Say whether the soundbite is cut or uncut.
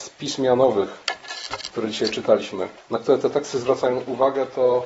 cut